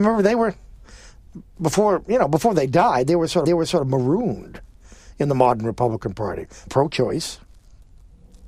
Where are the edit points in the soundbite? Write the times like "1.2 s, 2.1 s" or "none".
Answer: 3.5 s, 6.7 s